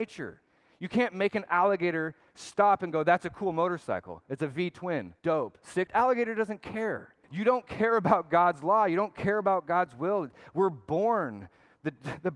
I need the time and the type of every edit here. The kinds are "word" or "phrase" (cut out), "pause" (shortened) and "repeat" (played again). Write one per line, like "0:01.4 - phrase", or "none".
0:05.2 - pause
0:05.9 - phrase
0:07.2 - pause